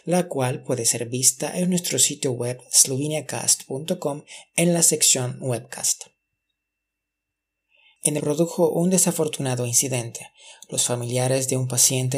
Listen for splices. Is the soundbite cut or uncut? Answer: cut